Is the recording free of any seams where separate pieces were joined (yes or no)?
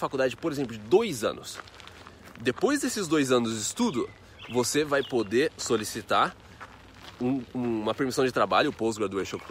yes